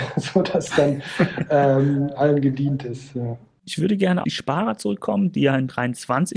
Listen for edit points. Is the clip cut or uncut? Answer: cut